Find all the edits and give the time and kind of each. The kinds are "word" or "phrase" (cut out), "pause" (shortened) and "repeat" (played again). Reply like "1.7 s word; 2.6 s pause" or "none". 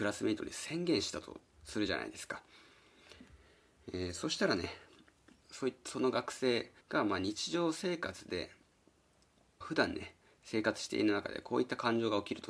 5.4 s phrase; 6.8 s pause; 9.6 s phrase